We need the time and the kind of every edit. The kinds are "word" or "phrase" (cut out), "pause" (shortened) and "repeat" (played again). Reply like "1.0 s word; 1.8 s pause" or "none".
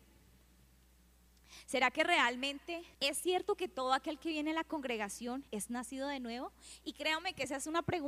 2.9 s pause; 5.5 s pause